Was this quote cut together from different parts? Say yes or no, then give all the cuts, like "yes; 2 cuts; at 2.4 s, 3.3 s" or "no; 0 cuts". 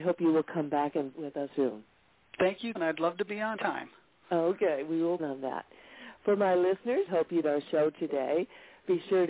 yes; 7 cuts; at 1.1 s, 1.5 s, 2.8 s, 3.6 s, 5.2 s, 7.1 s, 7.4 s